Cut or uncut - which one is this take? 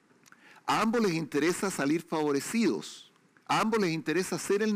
uncut